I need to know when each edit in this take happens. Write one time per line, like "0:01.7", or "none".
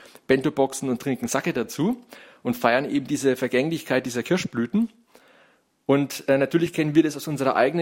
none